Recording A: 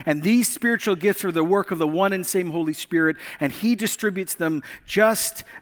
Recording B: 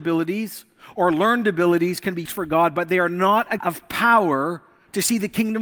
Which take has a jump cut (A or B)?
B